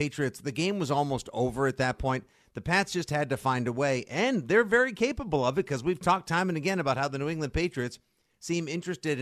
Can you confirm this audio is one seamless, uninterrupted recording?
yes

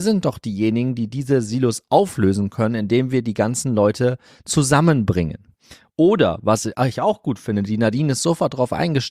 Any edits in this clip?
no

